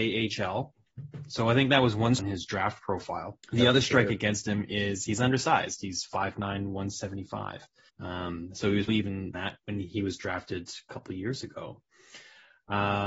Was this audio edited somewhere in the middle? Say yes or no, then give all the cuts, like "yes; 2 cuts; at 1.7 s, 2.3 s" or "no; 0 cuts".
yes; 5 cuts; at 2.2 s, 3.4 s, 7.9 s, 8.9 s, 9.3 s